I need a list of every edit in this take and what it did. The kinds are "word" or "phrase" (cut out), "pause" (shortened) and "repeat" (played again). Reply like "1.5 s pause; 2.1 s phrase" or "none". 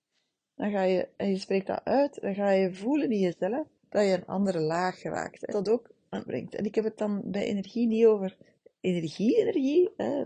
3.8 s pause; 5.5 s word; 6.3 s phrase